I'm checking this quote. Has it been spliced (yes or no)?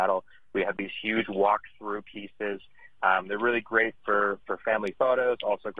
no